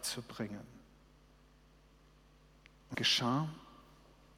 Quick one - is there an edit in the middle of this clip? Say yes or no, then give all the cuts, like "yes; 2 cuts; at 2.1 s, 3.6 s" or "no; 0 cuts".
yes; 1 cut; at 2.9 s